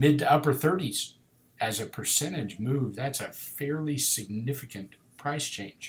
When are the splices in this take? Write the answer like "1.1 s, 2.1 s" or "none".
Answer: none